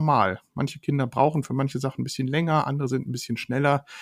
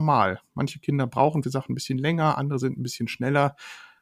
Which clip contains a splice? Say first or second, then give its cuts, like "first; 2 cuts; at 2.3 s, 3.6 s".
second; 1 cut; at 1.4 s